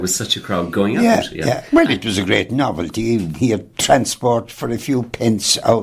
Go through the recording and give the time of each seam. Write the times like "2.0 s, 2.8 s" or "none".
3.7 s